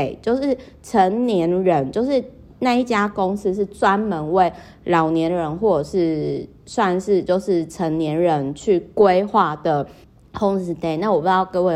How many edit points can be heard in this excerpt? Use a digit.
1